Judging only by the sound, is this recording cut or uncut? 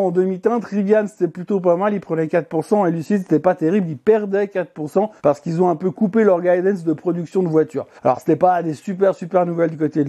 cut